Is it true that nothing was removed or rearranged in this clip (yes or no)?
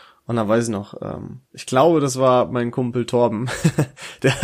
no